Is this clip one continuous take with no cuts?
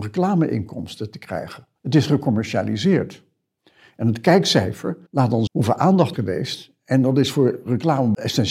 no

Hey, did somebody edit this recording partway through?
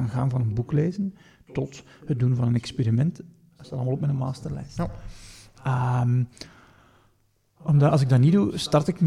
no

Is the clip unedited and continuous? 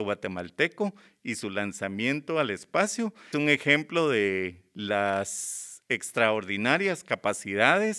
no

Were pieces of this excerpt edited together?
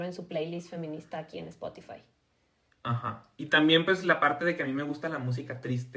no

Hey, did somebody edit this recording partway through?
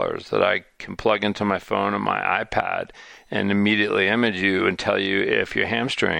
no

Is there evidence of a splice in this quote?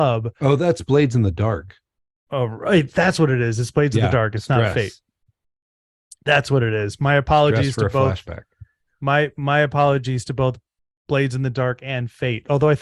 no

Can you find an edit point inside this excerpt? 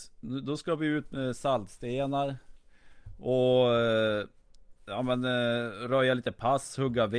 yes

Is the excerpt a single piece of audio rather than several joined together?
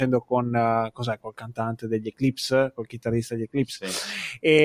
yes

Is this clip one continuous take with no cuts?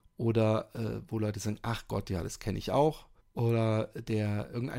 no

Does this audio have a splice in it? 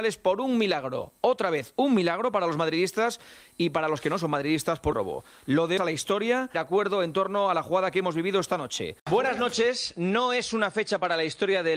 yes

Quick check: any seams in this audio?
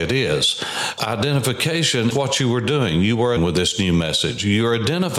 yes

